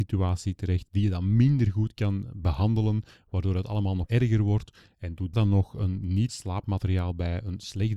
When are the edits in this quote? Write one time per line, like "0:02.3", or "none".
0:04.1
0:05.3
0:06.3

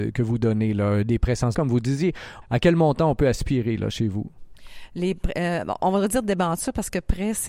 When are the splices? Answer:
0:01.5

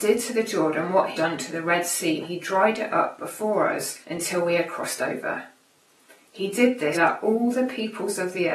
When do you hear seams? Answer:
0:01.1
0:02.2
0:04.0
0:06.9

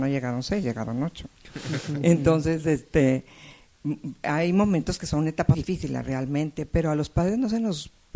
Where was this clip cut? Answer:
0:05.5

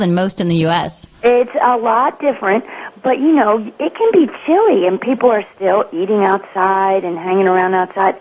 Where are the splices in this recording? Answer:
none

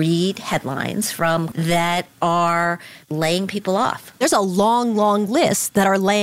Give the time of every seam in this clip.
0:01.5
0:03.0

